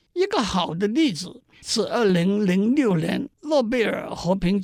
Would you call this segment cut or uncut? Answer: cut